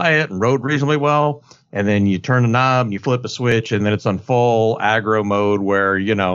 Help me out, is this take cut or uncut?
uncut